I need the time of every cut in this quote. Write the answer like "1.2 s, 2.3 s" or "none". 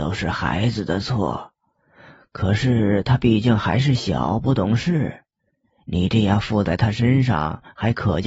none